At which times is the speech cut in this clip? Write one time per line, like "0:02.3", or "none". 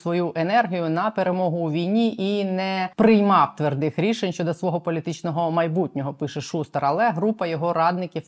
0:02.9